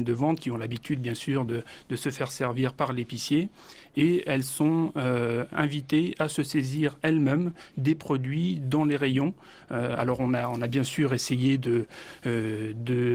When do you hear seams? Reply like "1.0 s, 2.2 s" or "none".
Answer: none